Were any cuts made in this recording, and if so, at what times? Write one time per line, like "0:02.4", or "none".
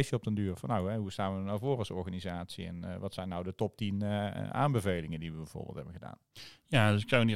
none